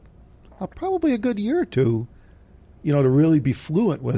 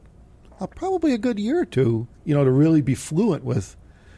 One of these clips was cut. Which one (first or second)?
second